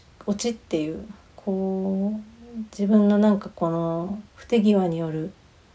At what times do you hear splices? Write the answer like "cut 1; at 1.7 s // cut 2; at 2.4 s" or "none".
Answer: cut 1; at 1.2 s // cut 2; at 4.3 s